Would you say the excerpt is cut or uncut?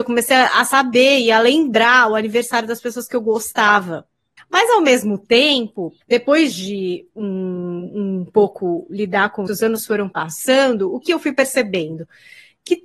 cut